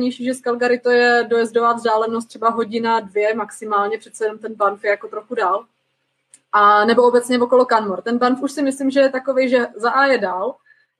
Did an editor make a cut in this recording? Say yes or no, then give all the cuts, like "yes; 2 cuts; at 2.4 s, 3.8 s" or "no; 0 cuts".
no; 0 cuts